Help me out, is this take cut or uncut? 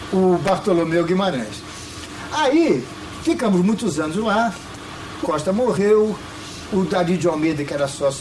cut